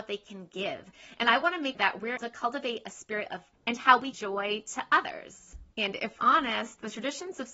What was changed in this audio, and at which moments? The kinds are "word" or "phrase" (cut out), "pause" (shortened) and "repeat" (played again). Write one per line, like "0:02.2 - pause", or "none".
0:01.7 - word
0:02.2 - word
0:03.5 - word
0:04.1 - phrase
0:05.7 - pause
0:06.2 - word